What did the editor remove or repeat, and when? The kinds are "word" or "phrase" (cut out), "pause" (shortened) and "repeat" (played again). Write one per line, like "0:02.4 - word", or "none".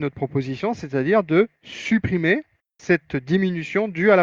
0:02.6 - pause

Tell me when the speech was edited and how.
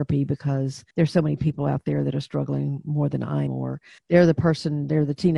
0:00.9 - pause
0:03.5 - word
0:04.0 - pause

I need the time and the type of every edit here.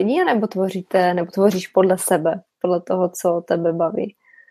none

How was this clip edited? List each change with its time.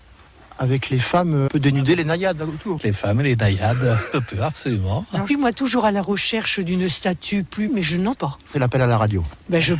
0:01.5 - word
0:02.8 - word
0:04.1 - word
0:05.3 - word
0:07.7 - word
0:08.2 - word
0:08.5 - word

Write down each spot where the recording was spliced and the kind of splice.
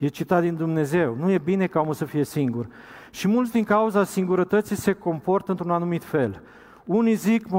none

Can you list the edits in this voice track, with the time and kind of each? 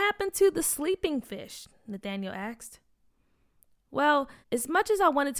0:04.4 - pause

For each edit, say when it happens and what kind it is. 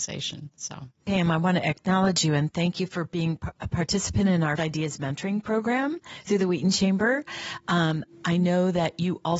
0:01.0 - pause
0:04.6 - word

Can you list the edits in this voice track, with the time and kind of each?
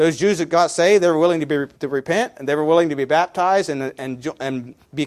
0:01.7 - pause

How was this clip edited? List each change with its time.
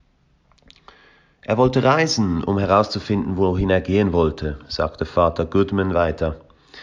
none

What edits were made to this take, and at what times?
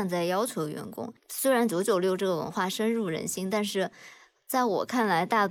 0:01.2 - pause

